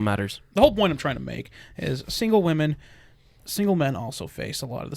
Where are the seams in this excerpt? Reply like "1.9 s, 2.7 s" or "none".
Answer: none